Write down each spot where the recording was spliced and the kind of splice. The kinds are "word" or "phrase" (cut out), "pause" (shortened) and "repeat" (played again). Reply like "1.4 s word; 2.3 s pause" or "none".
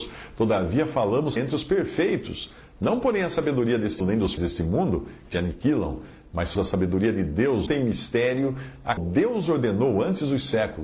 1.4 s word; 4.0 s word; 4.4 s word; 5.3 s word; 6.5 s word; 7.7 s word; 9.0 s word

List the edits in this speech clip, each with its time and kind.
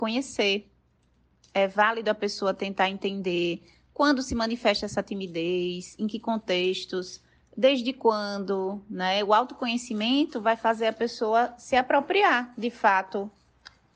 none

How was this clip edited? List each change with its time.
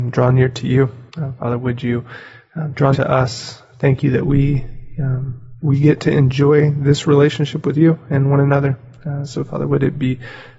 1.1 s pause; 2.9 s word; 5.6 s pause

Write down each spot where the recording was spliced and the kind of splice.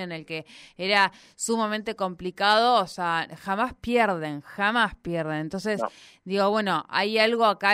none

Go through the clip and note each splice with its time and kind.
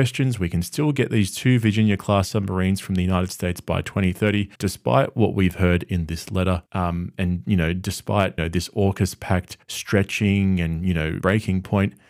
4.5 s pause; 6.7 s pause; 8.4 s word; 9.6 s pause; 11.2 s word

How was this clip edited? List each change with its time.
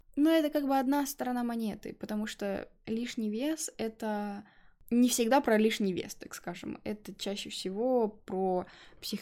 none

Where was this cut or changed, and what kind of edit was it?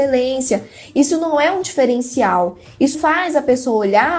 2.9 s word

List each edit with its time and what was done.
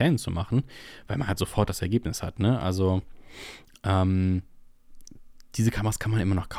5.4 s pause

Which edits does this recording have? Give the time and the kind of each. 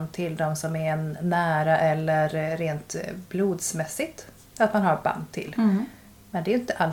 none

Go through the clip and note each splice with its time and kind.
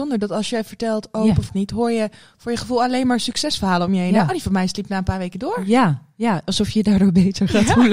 1.5 s phrase

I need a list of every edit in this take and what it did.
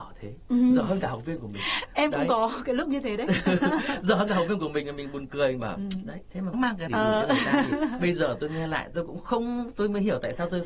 6.5 s phrase; 6.9 s phrase

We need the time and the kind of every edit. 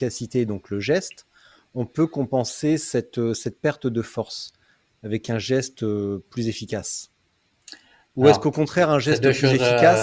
none

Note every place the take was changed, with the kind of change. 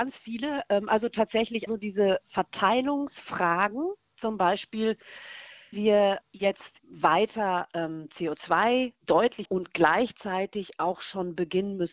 1.7 s word; 2.2 s word; 5.7 s word; 6.2 s word; 6.8 s word; 9.0 s word; 9.5 s word

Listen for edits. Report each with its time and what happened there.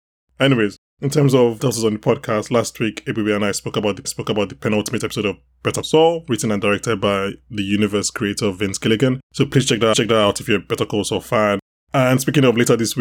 1.6 s word; 4.0 s repeat; 5.8 s word; 9.3 s pause; 9.9 s repeat; 11.7 s pause

